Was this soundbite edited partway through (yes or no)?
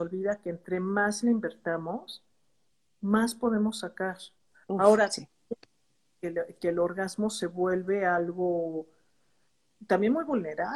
no